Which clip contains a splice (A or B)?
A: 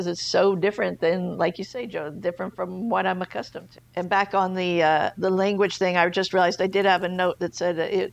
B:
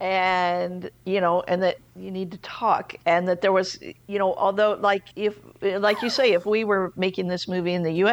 B